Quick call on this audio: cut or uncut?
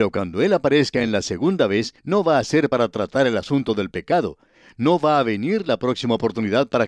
cut